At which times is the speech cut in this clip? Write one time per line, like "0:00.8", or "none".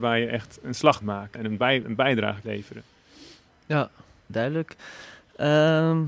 0:01.0
0:01.3
0:01.8
0:02.4
0:04.3